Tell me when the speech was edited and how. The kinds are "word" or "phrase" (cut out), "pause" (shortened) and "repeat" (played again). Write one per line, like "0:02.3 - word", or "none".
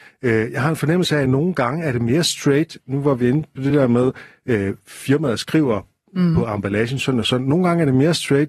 none